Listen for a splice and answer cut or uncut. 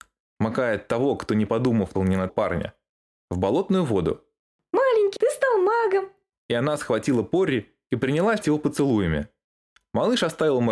cut